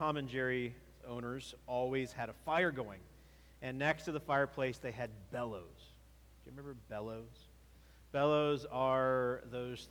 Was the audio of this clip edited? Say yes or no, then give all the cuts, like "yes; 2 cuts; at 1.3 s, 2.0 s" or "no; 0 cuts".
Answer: no; 0 cuts